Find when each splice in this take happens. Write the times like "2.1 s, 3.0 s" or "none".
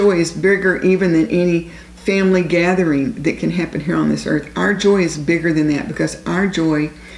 none